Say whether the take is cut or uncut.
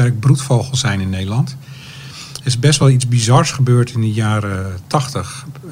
uncut